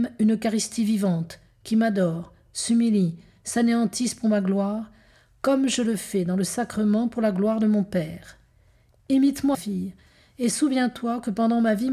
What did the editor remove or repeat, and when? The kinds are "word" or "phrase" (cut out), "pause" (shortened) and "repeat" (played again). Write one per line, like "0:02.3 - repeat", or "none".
0:09.5 - word